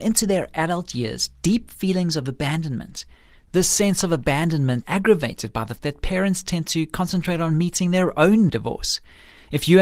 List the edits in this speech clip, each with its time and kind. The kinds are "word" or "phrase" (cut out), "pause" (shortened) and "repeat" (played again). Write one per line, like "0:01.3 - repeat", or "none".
0:04.8 - word
0:05.8 - word
0:08.5 - phrase

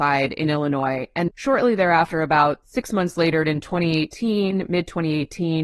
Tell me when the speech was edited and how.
0:01.3 - word

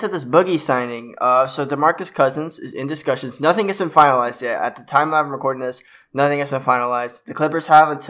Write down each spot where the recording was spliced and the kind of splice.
none

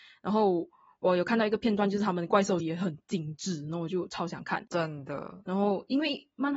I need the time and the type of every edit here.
0:02.6 - word

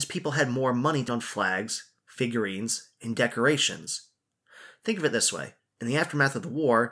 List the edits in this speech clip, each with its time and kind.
0:01.1 - word
0:05.6 - pause

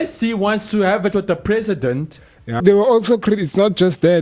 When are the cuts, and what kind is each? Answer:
0:01.1 - word
0:02.6 - word

